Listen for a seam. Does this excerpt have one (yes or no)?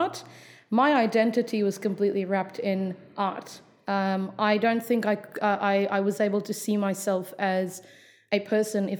no